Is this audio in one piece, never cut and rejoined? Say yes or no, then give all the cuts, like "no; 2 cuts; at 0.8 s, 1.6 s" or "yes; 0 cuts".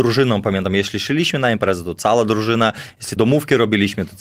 no; 1 cut; at 3.2 s